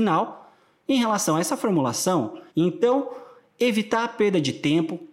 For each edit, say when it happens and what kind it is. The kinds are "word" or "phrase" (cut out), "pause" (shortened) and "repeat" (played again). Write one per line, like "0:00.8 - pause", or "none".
0:02.5 - pause